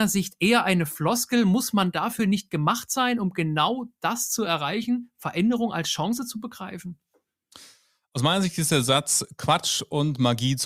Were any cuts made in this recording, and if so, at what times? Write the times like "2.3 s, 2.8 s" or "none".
none